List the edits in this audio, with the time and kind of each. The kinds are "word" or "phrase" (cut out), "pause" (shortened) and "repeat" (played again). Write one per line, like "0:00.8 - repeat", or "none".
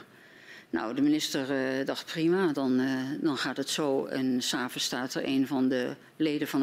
none